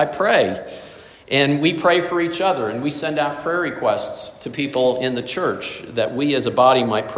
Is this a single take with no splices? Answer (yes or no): yes